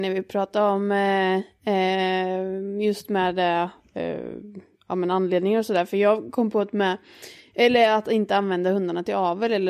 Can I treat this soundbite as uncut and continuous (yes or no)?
yes